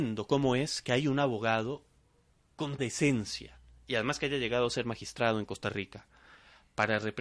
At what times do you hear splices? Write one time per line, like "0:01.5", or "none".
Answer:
0:02.8